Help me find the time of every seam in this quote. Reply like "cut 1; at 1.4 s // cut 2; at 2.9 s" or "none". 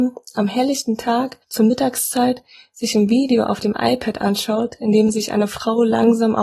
cut 1; at 1.4 s